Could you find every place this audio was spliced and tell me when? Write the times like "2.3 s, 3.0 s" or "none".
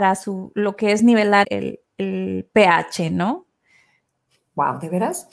1.4 s